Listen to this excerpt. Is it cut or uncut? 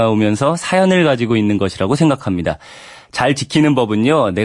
uncut